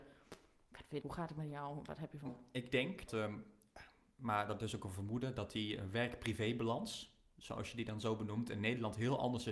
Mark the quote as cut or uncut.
cut